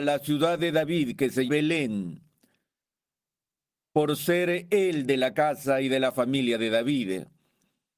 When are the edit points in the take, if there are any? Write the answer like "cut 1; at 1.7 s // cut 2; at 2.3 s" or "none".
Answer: cut 1; at 1.5 s